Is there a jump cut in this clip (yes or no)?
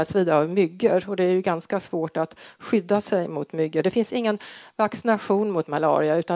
no